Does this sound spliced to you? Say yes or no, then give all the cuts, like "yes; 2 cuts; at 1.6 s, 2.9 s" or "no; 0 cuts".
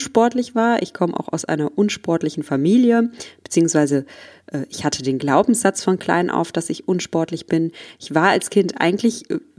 no; 0 cuts